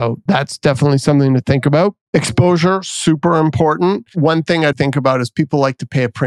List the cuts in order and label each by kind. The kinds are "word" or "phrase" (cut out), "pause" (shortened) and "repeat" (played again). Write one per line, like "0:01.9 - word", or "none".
0:04.7 - word